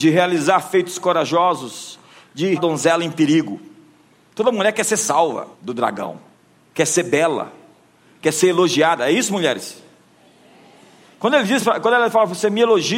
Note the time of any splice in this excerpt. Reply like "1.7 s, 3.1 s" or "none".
2.5 s, 5.5 s, 6.3 s